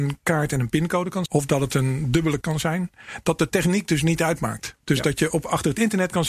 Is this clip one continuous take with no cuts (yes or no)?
no